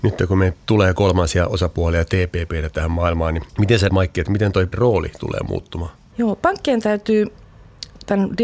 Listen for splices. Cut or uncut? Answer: cut